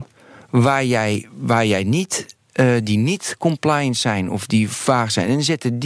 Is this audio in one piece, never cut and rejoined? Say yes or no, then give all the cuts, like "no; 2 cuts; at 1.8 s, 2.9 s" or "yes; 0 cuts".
yes; 0 cuts